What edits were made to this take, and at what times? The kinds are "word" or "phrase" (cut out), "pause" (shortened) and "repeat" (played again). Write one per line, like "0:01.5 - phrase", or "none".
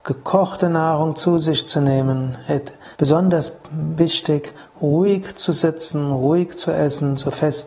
0:02.9 - pause